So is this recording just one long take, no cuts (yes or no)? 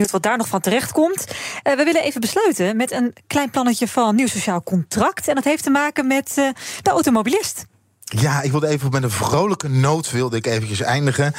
yes